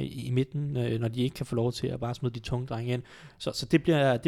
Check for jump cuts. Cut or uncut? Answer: uncut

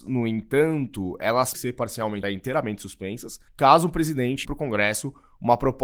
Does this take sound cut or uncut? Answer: cut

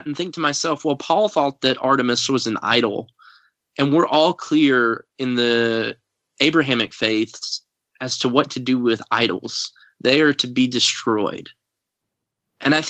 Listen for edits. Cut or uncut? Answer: uncut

